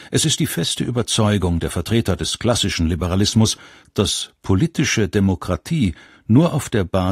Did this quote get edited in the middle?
no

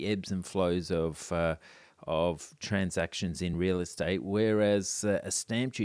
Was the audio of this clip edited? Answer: no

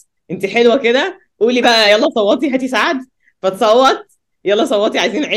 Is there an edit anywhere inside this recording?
no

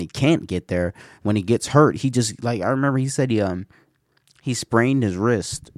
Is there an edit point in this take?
no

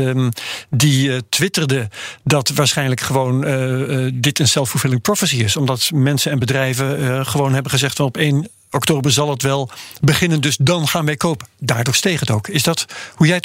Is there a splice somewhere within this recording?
no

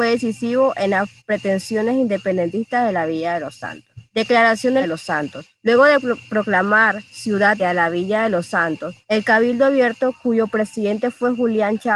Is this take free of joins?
no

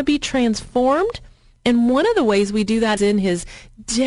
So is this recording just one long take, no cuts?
no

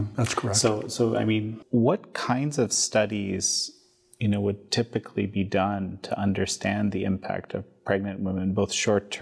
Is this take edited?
no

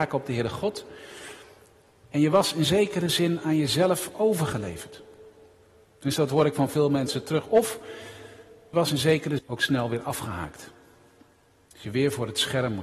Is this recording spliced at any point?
yes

